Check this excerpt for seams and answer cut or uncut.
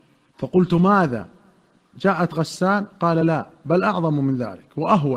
uncut